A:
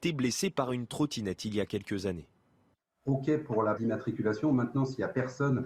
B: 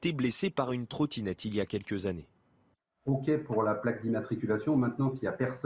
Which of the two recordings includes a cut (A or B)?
A